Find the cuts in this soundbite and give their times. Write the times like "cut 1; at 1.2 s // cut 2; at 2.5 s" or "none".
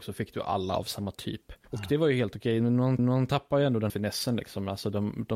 cut 1; at 1.6 s // cut 2; at 3.0 s // cut 3; at 3.9 s